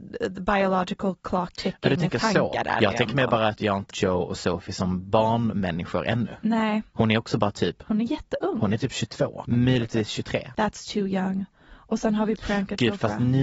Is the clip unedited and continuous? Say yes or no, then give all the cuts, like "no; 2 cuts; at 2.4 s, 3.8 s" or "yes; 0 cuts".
no; 2 cuts; at 1.5 s, 3.9 s